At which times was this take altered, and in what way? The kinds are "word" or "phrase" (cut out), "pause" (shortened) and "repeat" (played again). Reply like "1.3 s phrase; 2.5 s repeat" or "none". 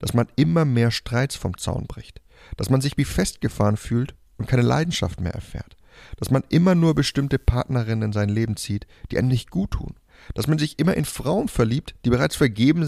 none